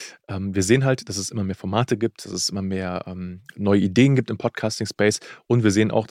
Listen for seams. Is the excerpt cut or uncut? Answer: uncut